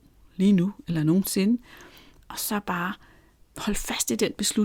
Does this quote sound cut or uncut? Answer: uncut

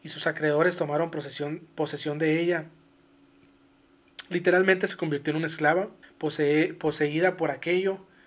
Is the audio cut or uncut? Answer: cut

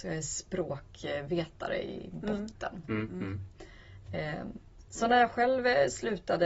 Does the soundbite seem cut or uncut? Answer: uncut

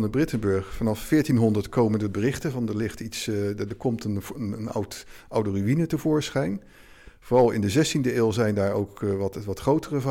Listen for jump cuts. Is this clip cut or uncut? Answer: uncut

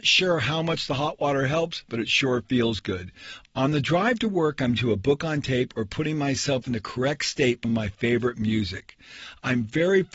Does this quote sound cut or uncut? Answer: cut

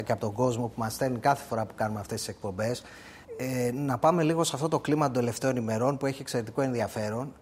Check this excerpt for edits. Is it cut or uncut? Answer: cut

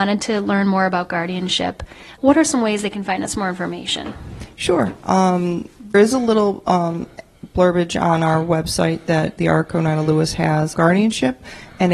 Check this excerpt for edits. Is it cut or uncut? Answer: cut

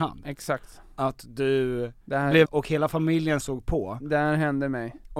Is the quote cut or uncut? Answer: cut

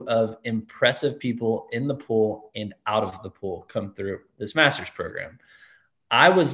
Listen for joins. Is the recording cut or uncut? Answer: uncut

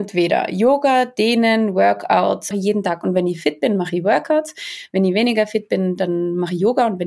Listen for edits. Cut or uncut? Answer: cut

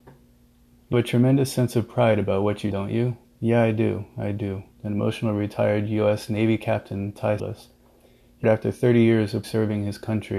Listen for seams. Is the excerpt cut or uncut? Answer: cut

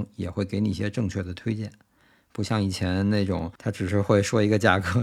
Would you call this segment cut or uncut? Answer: cut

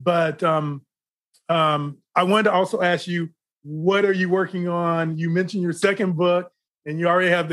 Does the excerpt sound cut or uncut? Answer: uncut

